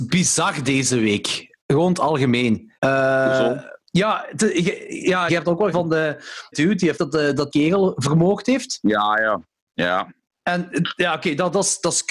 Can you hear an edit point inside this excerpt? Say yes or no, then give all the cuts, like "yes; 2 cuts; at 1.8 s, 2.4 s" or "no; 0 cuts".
yes; 7 cuts; at 1.6 s, 2.8 s, 5.3 s, 5.7 s, 6.5 s, 7.0 s, 7.5 s